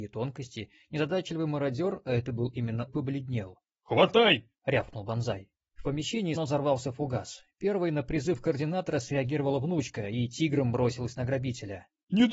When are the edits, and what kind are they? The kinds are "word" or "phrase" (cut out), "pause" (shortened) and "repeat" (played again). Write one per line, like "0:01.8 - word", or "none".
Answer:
0:02.9 - phrase
0:06.3 - word